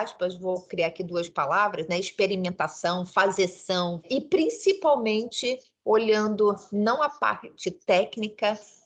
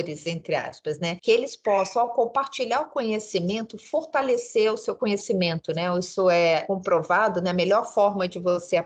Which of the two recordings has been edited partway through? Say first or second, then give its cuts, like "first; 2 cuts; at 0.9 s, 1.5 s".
first; 1 cut; at 4.0 s